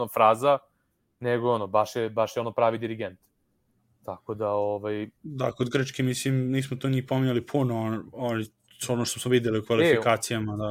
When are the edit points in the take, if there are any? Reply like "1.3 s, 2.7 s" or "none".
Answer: 8.5 s